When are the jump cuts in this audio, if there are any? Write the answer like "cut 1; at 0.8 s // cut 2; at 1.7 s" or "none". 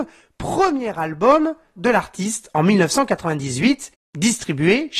cut 1; at 1.8 s